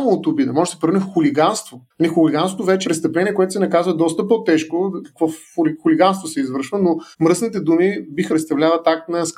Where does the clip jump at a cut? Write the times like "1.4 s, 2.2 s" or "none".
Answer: 1.9 s, 2.8 s, 5.0 s, 7.1 s, 8.3 s